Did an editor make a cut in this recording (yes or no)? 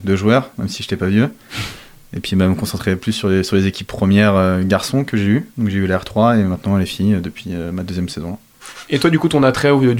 no